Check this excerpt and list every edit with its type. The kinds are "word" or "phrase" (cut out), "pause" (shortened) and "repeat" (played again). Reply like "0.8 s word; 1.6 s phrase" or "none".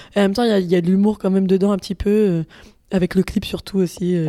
none